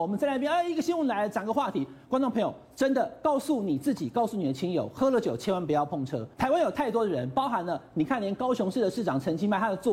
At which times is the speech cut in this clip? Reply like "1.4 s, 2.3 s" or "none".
6.3 s